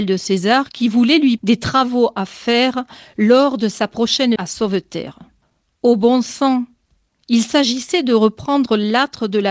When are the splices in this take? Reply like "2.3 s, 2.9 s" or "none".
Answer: 1.4 s, 4.4 s, 5.4 s

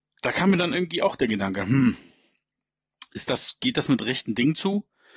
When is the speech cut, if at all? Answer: none

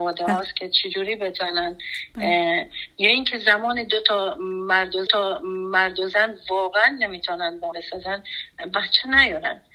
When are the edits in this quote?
5.1 s, 7.7 s

